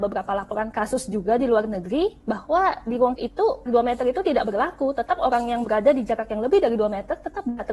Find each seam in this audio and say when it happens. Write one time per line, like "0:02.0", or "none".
0:03.2
0:03.7